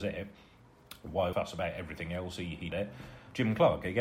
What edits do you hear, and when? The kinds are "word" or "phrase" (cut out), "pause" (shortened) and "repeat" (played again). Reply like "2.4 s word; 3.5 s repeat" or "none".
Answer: 1.3 s phrase; 2.7 s phrase